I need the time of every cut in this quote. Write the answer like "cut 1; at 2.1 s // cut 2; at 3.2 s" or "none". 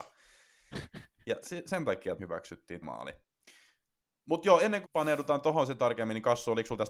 cut 1; at 1.4 s // cut 2; at 2.2 s // cut 3; at 2.8 s // cut 4; at 4.8 s